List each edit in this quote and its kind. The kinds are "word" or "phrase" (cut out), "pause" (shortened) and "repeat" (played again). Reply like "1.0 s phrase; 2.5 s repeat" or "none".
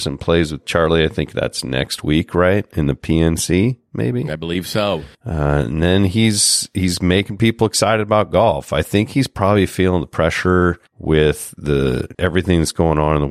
5.1 s pause; 10.9 s pause; 12.1 s word